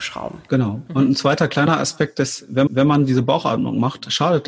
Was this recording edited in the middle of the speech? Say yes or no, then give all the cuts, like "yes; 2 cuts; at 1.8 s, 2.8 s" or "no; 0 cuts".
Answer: yes; 1 cut; at 2.7 s